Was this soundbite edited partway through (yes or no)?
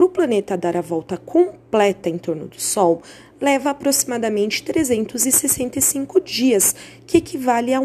no